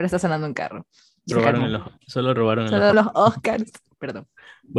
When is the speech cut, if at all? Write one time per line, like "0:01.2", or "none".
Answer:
0:01.3
0:02.0
0:02.9